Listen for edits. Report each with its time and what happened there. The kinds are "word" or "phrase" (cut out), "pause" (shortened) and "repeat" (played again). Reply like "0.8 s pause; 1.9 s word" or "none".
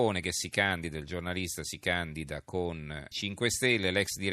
3.1 s word